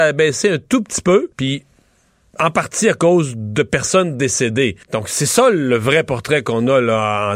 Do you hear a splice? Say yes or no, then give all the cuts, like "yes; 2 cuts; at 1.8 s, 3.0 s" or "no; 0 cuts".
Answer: yes; 2 cuts; at 1.3 s, 4.8 s